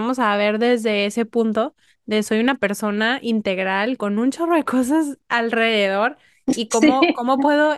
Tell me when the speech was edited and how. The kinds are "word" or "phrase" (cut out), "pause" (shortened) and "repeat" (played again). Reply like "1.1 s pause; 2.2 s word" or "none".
none